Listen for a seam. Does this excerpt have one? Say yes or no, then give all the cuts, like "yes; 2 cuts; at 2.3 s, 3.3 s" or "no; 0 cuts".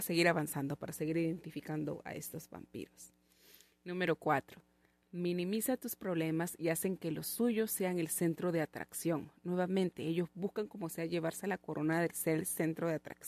no; 0 cuts